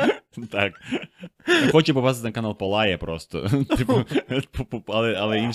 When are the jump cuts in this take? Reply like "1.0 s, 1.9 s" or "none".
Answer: none

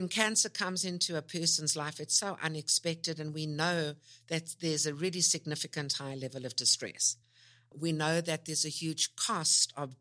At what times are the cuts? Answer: none

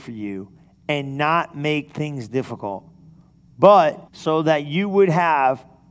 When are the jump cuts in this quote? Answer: 4.1 s

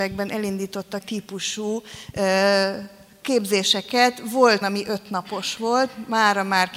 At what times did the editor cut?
1.0 s, 4.6 s

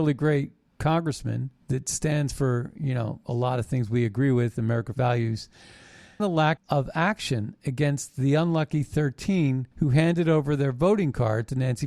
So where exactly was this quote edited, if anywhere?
1.6 s, 4.9 s, 6.2 s, 6.6 s, 9.7 s

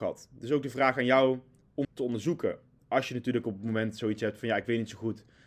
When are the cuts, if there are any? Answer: 1.8 s

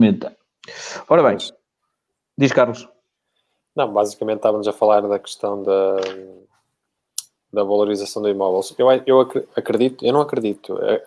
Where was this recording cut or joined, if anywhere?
none

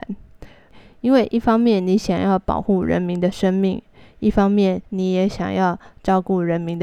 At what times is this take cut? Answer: 4.8 s

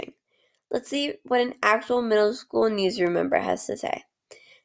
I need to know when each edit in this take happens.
none

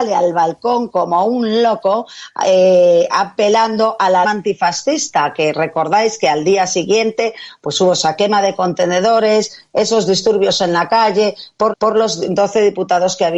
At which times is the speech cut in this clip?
4.2 s, 11.7 s

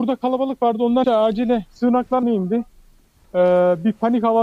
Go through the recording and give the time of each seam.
1.0 s, 2.2 s

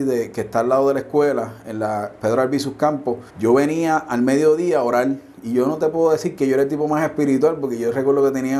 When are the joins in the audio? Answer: 3.3 s

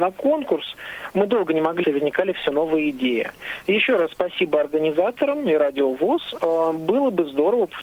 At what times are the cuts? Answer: 1.8 s

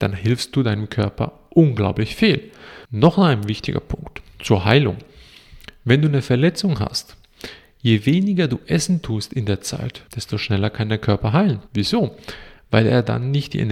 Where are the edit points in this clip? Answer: 2.8 s, 10.1 s, 11.7 s

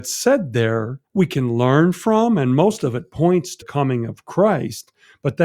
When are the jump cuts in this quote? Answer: 1.1 s, 3.6 s

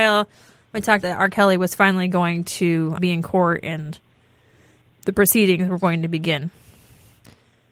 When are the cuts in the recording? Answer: 1.0 s, 3.0 s

